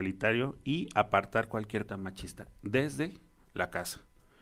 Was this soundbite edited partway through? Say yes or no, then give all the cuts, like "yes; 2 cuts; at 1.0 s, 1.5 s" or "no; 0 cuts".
yes; 1 cut; at 1.9 s